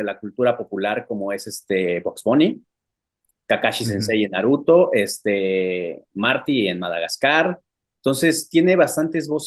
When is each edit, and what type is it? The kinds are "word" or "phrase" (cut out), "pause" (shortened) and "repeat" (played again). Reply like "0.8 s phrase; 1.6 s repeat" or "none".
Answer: none